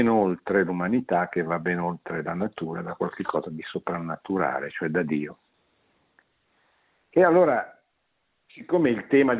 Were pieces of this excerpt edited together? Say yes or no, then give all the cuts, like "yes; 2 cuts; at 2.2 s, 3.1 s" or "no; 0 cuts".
no; 0 cuts